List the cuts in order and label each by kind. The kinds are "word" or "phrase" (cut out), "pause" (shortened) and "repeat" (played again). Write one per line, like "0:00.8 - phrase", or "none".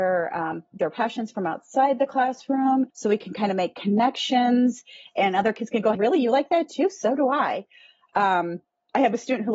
0:02.9 - pause
0:05.9 - word